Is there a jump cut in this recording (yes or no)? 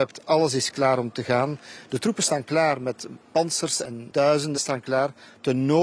yes